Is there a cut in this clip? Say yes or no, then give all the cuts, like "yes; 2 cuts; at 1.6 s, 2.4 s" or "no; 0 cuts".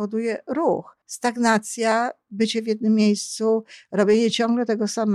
yes; 1 cut; at 1.0 s